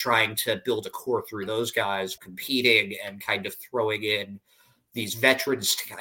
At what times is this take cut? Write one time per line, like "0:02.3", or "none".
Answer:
0:02.2